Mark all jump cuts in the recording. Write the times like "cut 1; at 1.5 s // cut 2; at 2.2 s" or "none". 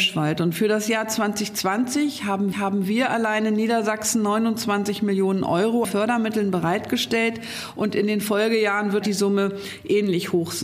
cut 1; at 2.5 s // cut 2; at 5.8 s // cut 3; at 9.0 s